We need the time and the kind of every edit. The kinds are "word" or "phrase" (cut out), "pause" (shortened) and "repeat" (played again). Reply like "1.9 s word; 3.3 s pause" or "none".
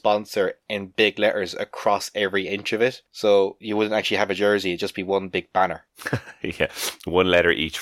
none

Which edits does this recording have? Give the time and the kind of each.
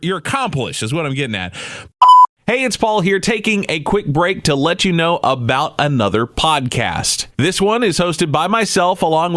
7.3 s pause

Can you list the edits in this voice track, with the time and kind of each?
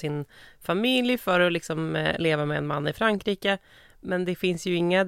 none

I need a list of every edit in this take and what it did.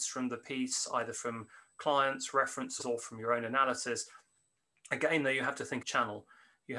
1.7 s word; 2.8 s word; 5.8 s word

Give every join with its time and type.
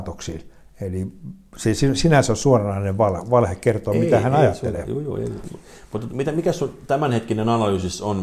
none

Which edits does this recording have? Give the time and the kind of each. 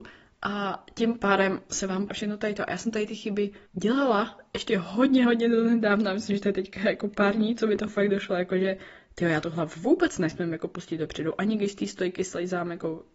2.1 s phrase; 3.7 s pause

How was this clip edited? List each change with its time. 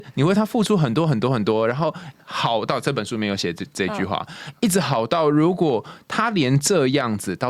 2.2 s pause

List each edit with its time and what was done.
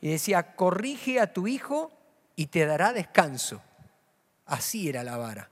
none

